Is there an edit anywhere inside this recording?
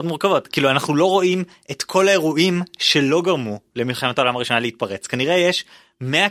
no; 0 cuts

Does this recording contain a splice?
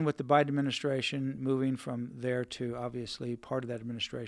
no; 0 cuts

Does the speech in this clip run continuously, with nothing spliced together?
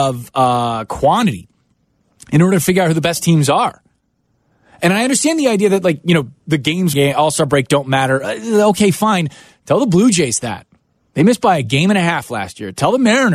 no; 1 cut; at 6.9 s

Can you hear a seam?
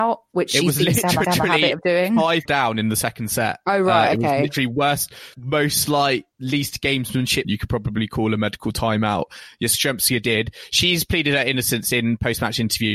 yes; 5 cuts; at 1.2 s, 2.5 s, 5.3 s, 6.3 s, 7.4 s

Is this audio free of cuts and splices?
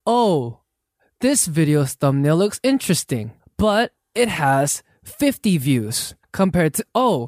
no; 2 cuts; at 3.4 s, 6.2 s

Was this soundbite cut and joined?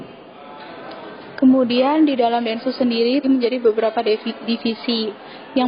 yes; 1 cut; at 3.2 s

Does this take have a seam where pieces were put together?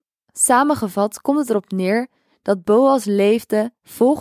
no; 0 cuts

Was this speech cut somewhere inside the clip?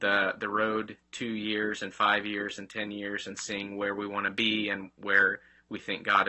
no; 0 cuts

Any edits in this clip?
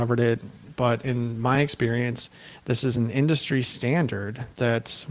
no; 0 cuts

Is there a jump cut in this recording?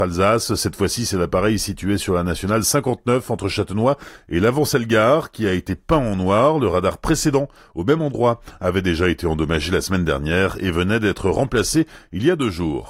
no; 0 cuts

